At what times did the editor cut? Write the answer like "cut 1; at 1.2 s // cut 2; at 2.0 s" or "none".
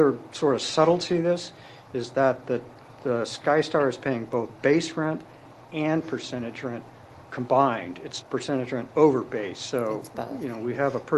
cut 1; at 8.2 s